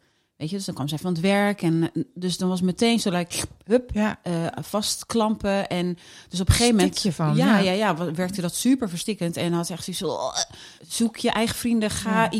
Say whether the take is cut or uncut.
cut